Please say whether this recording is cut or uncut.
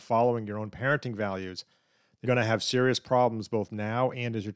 cut